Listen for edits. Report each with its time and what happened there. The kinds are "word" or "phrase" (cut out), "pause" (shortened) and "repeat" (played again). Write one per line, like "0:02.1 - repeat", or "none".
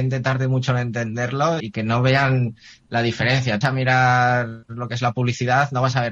0:01.6 - word
0:03.6 - phrase
0:04.6 - pause